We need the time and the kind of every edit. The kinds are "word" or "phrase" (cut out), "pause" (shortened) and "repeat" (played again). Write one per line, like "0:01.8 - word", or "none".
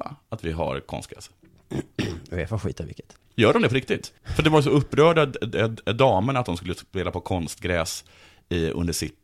0:04.2 - pause